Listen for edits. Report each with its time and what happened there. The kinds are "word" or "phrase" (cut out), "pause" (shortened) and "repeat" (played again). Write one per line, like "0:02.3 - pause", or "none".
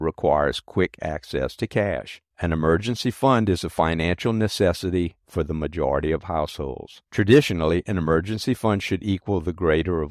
0:02.3 - pause
0:07.1 - pause

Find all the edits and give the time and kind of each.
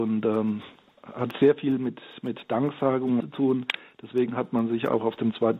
0:03.2 - phrase

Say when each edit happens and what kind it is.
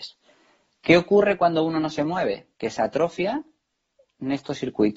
0:02.5 - pause

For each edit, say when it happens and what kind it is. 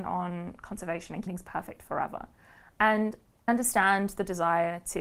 0:01.3 - word
0:03.5 - word

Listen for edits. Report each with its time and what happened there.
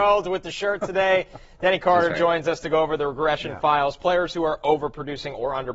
none

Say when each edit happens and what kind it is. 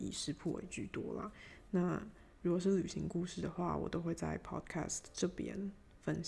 none

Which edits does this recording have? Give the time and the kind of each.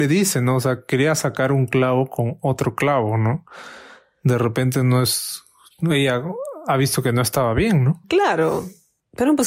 none

